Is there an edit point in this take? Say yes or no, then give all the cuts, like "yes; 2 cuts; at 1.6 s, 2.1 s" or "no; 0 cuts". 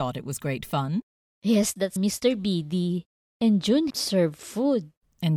yes; 2 cuts; at 2.0 s, 3.9 s